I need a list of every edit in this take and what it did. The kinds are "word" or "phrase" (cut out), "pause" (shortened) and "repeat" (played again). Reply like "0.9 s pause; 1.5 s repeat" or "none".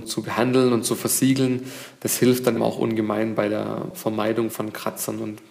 2.5 s word; 4.5 s word